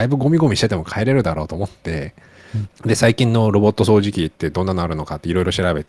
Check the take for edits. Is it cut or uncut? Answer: cut